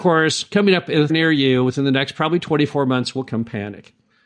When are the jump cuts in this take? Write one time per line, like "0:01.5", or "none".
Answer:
0:01.1